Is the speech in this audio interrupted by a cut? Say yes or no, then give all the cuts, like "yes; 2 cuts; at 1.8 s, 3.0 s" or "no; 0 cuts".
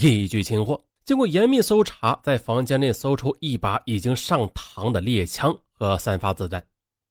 yes; 1 cut; at 1.0 s